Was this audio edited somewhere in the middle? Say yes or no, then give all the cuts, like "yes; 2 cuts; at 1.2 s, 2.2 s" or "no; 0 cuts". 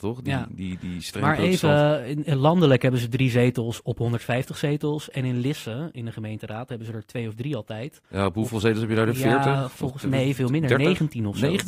yes; 1 cut; at 8.0 s